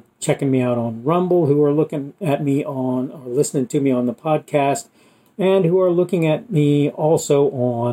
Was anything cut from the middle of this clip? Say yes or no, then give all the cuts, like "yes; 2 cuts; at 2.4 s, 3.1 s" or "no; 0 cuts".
no; 0 cuts